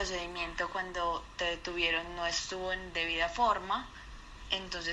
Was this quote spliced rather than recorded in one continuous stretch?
no; 0 cuts

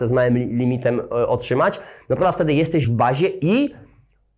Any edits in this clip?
yes; 1 cut; at 2.8 s

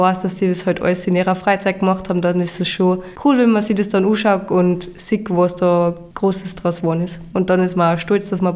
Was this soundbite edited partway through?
no; 0 cuts

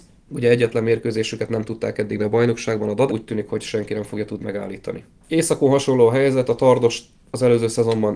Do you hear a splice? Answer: yes; 3 cuts; at 2.2 s, 3.1 s, 4.4 s

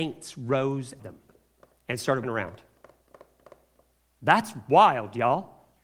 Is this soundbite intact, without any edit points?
no; 2 cuts; at 1.0 s, 2.2 s

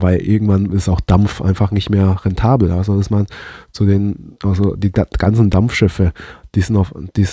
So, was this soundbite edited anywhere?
no; 0 cuts

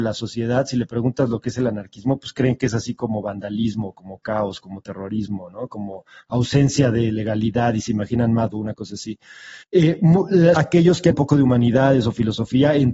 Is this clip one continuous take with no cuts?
no; 4 cuts; at 8.5 s, 9.6 s, 10.6 s, 11.1 s

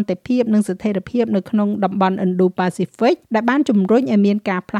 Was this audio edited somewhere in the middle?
yes; 1 cut; at 3.2 s

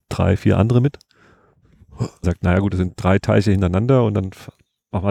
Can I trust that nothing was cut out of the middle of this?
no; 1 cut; at 2.2 s

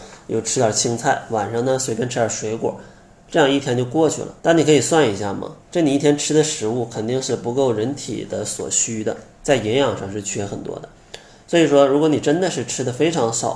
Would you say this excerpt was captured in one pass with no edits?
no; 3 cuts; at 4.4 s, 5.6 s, 9.3 s

